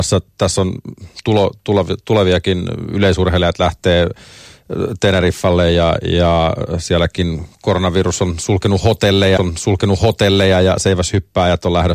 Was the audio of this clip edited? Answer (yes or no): yes